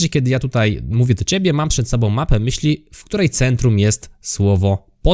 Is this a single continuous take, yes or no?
yes